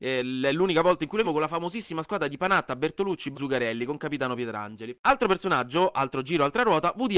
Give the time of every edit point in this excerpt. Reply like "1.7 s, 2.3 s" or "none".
1.2 s, 3.3 s